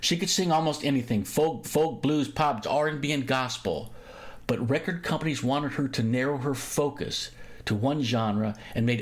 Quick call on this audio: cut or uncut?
cut